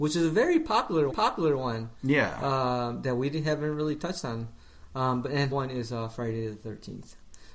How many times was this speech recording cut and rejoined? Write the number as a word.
two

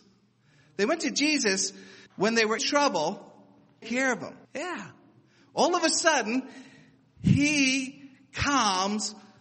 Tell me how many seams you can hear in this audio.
four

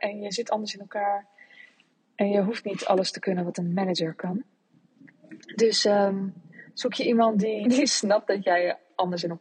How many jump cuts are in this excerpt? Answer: one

